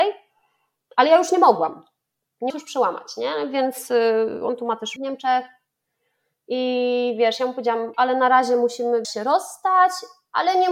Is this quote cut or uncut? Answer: cut